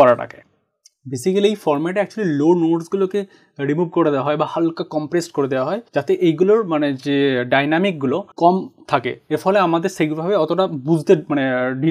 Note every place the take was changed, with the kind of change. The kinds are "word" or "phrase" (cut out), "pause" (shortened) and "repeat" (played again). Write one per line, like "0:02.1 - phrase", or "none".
0:05.9 - pause
0:08.3 - pause